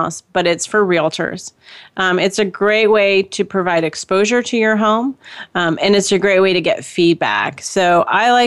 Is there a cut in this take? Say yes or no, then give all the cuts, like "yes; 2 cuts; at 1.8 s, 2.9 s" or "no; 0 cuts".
no; 0 cuts